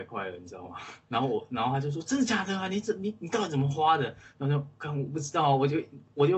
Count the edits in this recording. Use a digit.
1